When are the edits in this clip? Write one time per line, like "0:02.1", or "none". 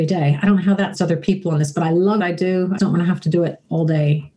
0:00.9
0:01.7
0:02.2
0:02.8